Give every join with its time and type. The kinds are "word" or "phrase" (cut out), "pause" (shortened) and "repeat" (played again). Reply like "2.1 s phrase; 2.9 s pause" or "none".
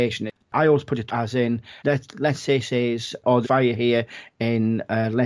1.1 s word; 1.8 s pause; 2.6 s word; 3.4 s phrase